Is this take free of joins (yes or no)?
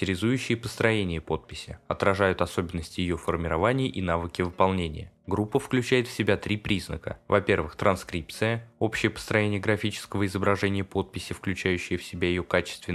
yes